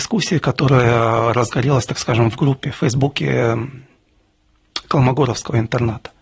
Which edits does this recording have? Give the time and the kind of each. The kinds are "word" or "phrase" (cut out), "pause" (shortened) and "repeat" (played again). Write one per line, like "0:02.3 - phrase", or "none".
none